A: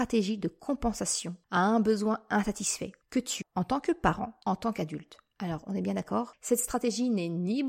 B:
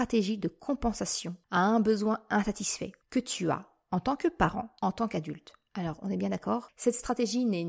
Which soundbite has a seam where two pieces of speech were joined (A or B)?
A